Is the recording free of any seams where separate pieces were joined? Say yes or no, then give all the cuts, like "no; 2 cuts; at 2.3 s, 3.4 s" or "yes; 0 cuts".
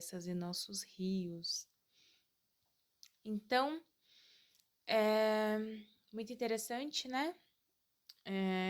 yes; 0 cuts